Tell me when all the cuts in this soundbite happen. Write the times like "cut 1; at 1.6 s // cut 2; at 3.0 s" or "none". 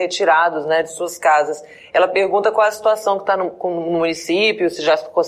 none